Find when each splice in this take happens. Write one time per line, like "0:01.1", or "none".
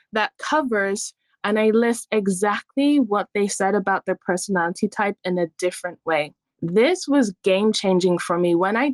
none